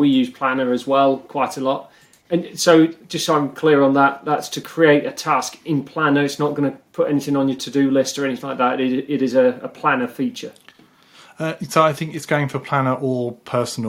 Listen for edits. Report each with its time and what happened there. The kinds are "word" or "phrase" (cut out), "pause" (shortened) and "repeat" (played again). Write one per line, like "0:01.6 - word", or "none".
none